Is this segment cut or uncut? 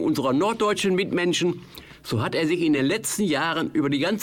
uncut